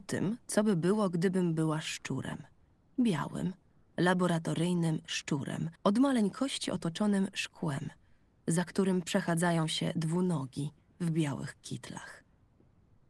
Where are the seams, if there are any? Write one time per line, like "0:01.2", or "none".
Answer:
0:05.8